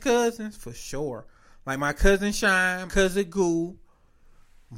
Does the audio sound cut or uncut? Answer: cut